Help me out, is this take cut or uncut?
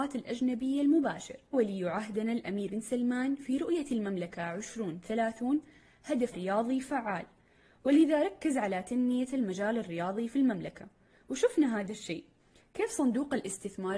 cut